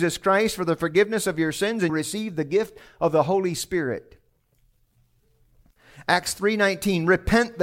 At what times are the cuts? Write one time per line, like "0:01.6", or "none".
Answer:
0:01.9